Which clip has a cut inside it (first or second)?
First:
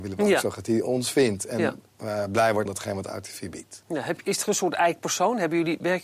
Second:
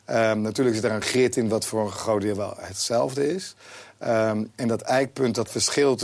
first